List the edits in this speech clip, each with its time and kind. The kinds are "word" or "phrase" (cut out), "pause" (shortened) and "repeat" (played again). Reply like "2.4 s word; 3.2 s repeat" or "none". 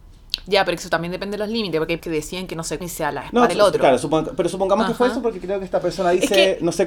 2.0 s word; 2.8 s word; 3.5 s word